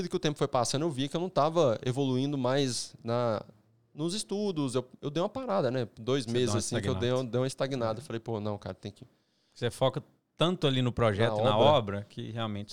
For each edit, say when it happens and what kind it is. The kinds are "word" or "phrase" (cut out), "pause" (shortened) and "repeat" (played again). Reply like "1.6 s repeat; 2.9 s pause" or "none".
none